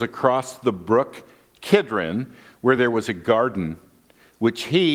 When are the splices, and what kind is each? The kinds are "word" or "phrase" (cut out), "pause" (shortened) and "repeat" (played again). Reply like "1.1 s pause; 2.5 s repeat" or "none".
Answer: none